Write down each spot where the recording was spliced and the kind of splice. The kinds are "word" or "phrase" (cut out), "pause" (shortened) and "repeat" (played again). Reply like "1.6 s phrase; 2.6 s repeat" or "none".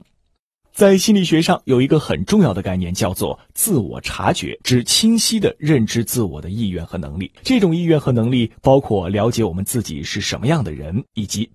4.6 s pause; 7.4 s pause